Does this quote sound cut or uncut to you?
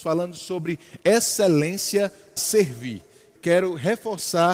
cut